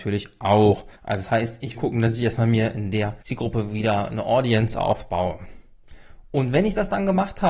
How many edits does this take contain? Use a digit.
3